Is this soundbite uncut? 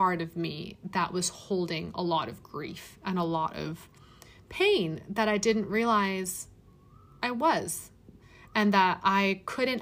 yes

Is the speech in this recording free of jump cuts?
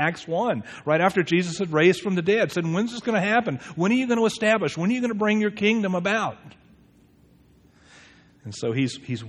yes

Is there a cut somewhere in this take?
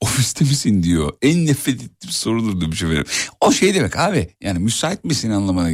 no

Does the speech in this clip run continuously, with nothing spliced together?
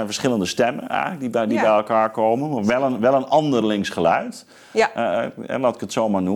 yes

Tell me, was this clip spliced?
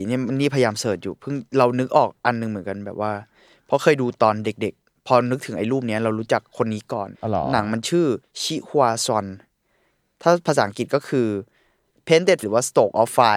yes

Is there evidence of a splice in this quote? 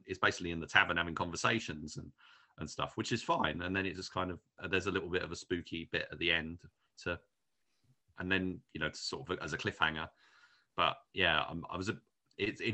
no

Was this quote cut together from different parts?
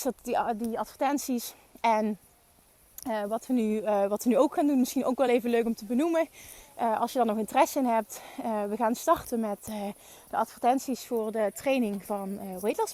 no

